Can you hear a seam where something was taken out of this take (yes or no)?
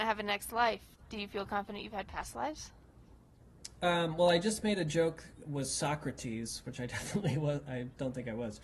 yes